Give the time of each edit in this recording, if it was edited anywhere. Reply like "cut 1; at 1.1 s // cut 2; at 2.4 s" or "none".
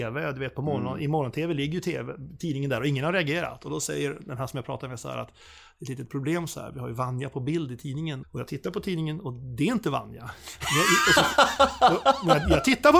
cut 1; at 8.2 s